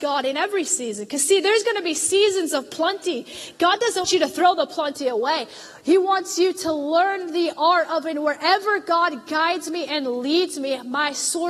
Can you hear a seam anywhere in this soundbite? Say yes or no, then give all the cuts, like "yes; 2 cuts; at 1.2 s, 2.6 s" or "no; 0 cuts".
yes; 1 cut; at 4.0 s